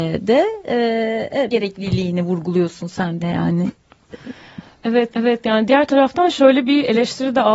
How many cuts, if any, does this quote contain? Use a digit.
3